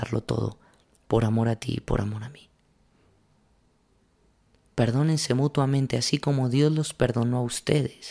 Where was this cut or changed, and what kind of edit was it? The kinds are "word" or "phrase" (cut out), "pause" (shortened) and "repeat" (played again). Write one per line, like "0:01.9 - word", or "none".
none